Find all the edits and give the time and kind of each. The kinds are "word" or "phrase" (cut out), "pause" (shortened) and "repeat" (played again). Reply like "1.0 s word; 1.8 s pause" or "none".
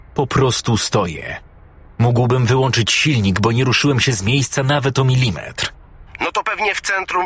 none